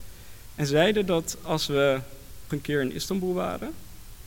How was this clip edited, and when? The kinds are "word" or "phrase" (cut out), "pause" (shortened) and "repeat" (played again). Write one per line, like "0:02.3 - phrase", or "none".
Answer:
0:02.5 - word